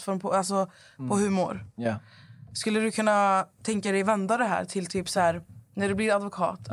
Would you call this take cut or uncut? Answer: uncut